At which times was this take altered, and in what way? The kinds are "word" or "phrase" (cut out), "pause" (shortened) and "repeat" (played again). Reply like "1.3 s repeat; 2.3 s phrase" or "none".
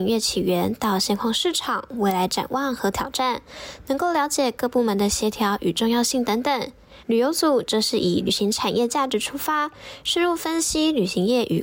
7.0 s pause